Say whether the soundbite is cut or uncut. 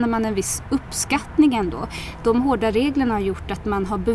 uncut